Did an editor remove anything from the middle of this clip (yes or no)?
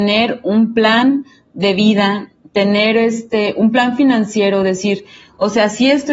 no